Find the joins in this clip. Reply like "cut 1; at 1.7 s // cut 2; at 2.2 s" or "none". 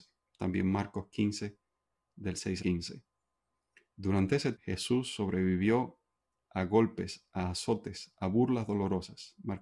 cut 1; at 2.6 s // cut 2; at 4.5 s